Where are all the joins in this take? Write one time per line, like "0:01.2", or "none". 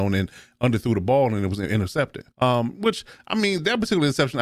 0:02.3